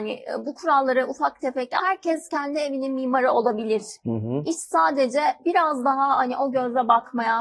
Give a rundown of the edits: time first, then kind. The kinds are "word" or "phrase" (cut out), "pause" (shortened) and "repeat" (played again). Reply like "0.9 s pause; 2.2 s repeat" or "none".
1.8 s word